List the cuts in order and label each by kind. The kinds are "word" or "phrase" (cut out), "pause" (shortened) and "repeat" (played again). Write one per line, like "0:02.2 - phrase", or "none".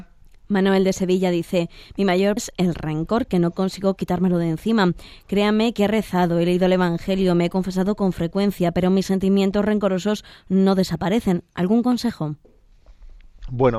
0:02.4 - word

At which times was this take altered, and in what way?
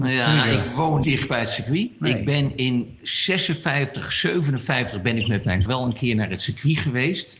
0:01.0 - word
0:05.7 - word

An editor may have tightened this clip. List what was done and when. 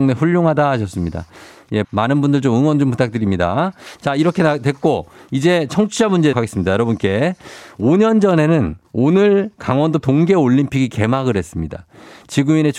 0:01.8 - word
0:06.3 - word
0:08.8 - pause
0:10.0 - word

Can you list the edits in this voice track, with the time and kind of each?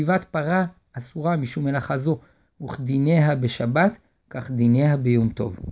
none

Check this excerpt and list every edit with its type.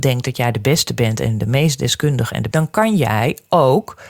0:02.5 - phrase

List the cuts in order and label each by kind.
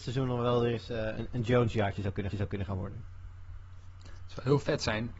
0:02.3 - repeat

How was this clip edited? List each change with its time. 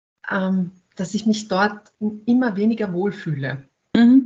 0:01.9 - pause

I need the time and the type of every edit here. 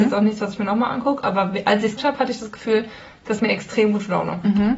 0:02.0 - word
0:03.4 - word

